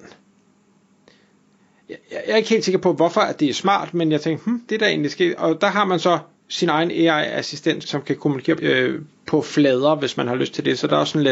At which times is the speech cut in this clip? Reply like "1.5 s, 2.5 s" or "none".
4.7 s, 7.8 s, 8.6 s